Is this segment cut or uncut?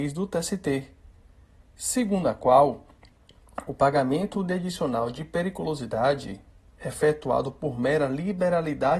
uncut